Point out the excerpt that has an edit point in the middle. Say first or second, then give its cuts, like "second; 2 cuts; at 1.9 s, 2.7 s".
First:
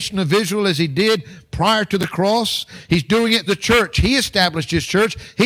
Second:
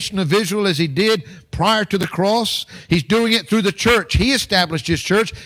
first; 1 cut; at 3.5 s